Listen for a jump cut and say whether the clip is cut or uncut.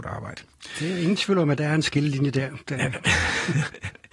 uncut